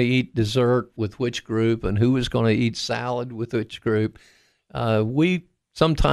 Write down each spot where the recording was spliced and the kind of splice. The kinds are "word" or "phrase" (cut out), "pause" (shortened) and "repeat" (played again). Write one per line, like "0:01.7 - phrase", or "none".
none